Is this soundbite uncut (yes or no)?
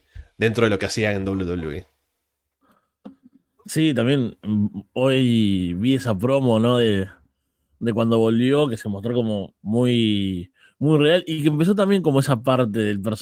no